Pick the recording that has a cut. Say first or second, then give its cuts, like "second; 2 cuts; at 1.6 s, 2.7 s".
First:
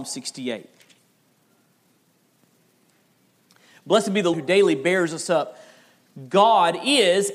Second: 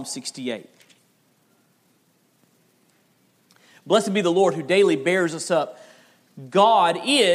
first; 1 cut; at 4.3 s